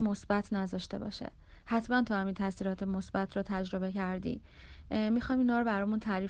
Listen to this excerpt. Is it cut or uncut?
uncut